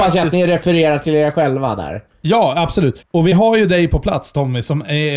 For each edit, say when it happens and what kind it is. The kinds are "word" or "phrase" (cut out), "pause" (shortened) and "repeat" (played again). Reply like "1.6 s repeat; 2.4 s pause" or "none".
none